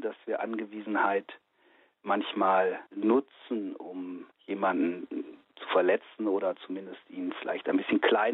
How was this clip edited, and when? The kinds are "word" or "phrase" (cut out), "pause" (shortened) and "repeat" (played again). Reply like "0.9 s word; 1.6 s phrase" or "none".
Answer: 2.9 s pause; 4.3 s pause